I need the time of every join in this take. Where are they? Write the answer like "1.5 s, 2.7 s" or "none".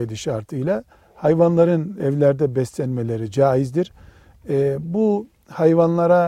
2.0 s